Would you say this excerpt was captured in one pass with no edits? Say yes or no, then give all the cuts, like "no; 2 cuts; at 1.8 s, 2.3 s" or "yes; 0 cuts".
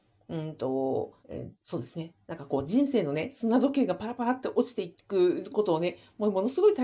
no; 2 cuts; at 1.2 s, 1.6 s